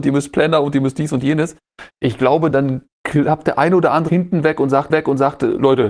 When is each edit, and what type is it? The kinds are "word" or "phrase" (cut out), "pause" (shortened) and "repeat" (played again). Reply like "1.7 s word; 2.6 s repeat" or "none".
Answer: 2.5 s word; 4.1 s word; 4.9 s repeat